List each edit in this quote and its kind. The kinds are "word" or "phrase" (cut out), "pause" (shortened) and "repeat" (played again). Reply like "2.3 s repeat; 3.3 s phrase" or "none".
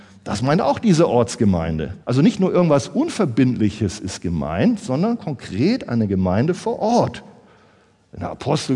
2.0 s pause